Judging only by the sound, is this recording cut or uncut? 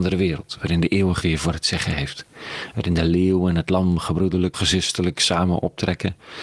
cut